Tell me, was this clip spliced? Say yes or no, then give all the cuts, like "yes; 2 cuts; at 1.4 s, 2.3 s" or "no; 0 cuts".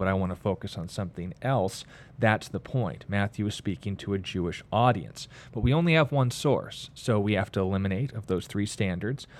no; 0 cuts